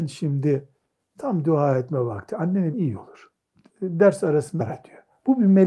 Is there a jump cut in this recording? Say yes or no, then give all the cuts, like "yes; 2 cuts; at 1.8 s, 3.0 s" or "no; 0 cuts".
yes; 3 cuts; at 2.7 s, 3.4 s, 4.6 s